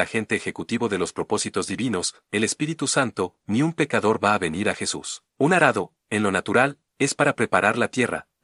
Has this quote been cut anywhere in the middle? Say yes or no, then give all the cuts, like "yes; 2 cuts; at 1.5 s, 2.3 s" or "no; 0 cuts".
yes; 1 cut; at 5.3 s